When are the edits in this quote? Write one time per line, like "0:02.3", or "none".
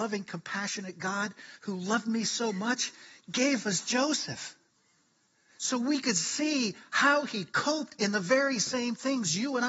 none

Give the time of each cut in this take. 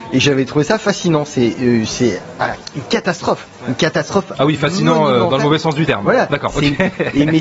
none

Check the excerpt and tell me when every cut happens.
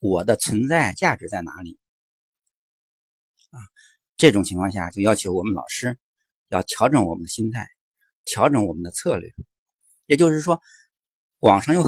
none

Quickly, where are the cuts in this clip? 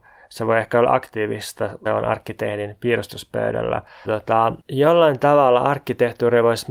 0:01.9
0:04.0
0:04.6

